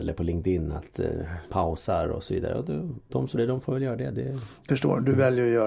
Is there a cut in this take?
yes; 3 cuts; at 1.5 s, 3.4 s, 4.7 s

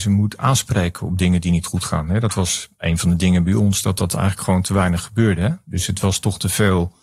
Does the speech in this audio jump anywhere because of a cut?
no; 0 cuts

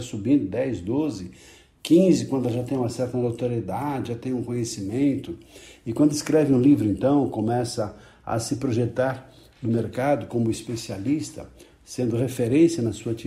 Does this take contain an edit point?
no; 0 cuts

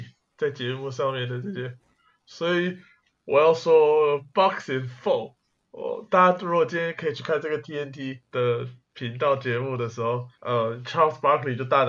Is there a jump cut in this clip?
no; 0 cuts

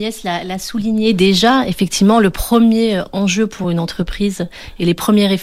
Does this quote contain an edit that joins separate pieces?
no; 0 cuts

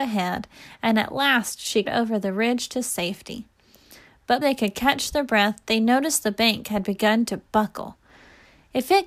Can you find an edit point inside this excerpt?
yes; 2 cuts; at 1.9 s, 4.4 s

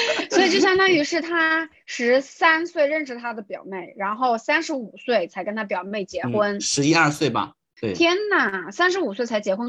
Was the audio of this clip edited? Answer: yes; 1 cut; at 7.8 s

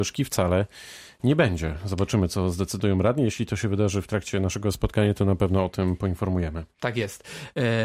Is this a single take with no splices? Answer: yes; 0 cuts

